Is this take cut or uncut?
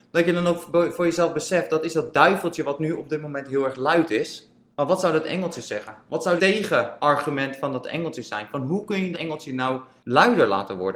cut